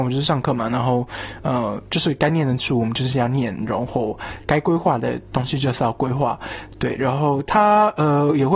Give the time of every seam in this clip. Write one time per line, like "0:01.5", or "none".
none